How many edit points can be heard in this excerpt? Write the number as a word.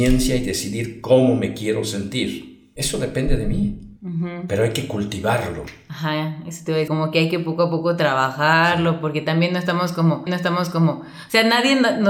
three